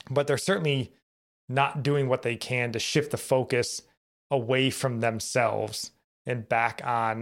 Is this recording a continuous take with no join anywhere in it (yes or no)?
yes